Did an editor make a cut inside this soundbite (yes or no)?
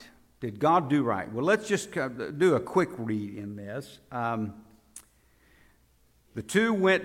no